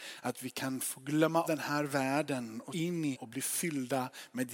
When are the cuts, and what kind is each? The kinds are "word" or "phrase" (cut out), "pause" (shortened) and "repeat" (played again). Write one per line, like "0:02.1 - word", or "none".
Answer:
0:01.4 - word
0:02.7 - word
0:03.1 - word